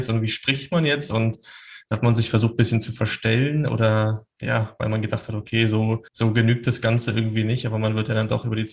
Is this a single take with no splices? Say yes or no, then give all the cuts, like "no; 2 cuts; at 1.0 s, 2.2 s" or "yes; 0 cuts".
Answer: no; 1 cut; at 6.1 s